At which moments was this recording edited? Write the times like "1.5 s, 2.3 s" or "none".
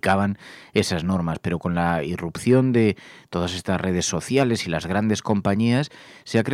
none